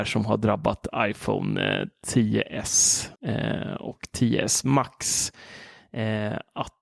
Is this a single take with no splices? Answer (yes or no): no